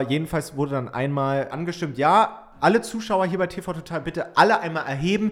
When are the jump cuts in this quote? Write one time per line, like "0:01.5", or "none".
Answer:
0:01.5